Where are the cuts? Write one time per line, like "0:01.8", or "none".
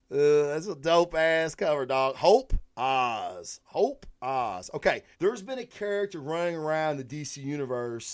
0:02.7
0:04.2
0:05.1